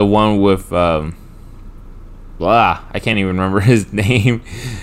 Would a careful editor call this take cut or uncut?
uncut